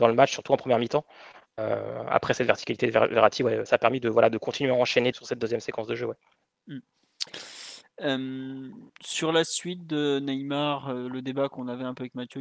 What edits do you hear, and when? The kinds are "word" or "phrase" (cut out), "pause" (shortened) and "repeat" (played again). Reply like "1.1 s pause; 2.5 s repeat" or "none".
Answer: 3.7 s word; 5.1 s word; 8.9 s pause